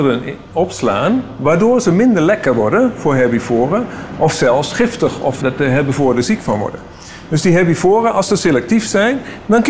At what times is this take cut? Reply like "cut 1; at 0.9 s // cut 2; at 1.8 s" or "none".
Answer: cut 1; at 5.4 s